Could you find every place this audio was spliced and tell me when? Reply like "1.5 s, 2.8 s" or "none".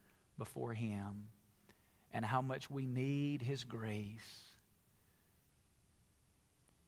none